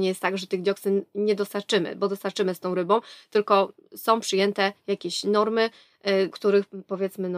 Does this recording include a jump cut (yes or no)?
yes